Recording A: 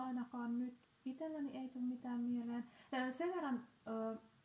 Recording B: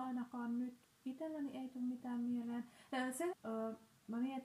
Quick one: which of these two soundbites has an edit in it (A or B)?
B